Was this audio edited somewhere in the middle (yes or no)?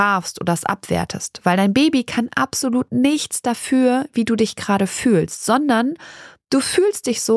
no